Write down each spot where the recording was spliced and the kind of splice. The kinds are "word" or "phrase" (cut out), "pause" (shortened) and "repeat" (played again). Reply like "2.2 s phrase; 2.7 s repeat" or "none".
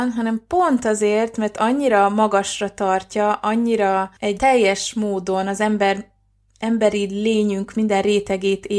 4.4 s word